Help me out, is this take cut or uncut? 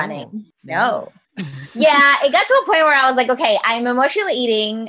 uncut